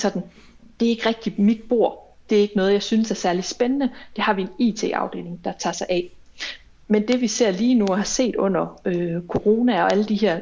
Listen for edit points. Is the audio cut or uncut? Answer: uncut